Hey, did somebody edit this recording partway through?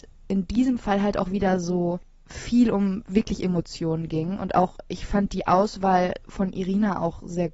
no; 0 cuts

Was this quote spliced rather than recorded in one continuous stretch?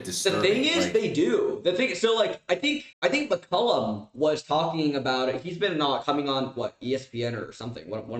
yes; 1 cut; at 2.9 s

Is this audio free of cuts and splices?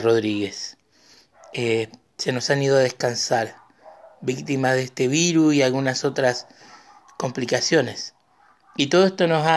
yes; 0 cuts

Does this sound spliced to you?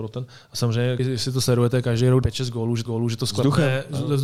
yes; 3 cuts; at 1.0 s, 2.2 s, 2.9 s

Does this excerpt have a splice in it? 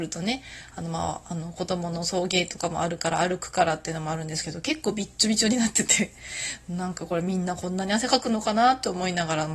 no; 0 cuts

